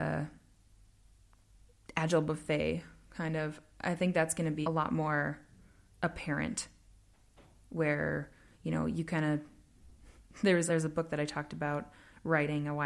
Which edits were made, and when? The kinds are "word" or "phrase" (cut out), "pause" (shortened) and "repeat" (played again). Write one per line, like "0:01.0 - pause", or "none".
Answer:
0:04.6 - word
0:10.7 - word